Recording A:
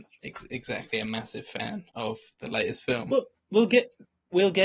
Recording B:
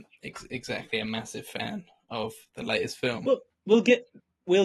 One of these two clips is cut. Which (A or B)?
A